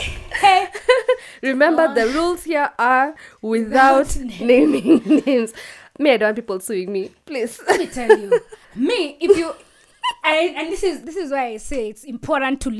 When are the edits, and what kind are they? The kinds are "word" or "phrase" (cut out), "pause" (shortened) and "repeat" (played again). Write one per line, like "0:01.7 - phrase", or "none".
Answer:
0:08.6 - pause